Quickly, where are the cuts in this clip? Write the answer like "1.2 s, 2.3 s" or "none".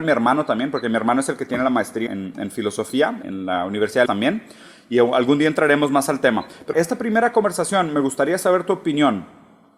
2.1 s, 3.2 s, 4.1 s, 6.7 s